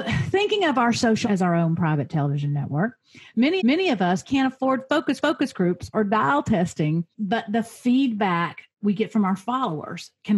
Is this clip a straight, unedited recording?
no; 6 cuts; at 1.2 s, 3.6 s, 4.2 s, 5.2 s, 7.1 s, 8.7 s

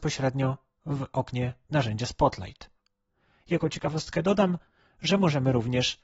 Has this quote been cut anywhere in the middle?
no; 0 cuts

